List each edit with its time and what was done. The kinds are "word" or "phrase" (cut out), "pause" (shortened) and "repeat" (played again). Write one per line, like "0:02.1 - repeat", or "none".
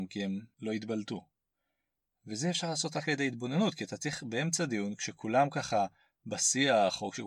none